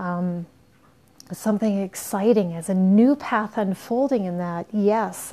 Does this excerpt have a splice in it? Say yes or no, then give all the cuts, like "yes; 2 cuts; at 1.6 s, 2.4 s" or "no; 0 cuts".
no; 0 cuts